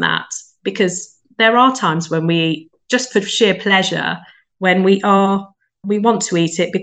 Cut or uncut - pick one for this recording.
uncut